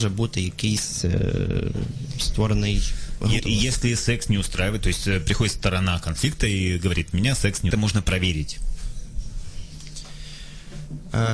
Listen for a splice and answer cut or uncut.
cut